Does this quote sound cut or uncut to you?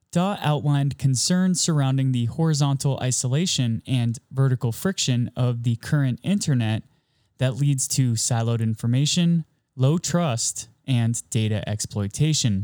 cut